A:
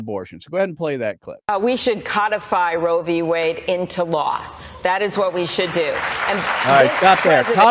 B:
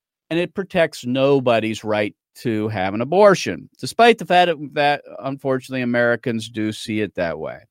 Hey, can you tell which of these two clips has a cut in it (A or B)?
A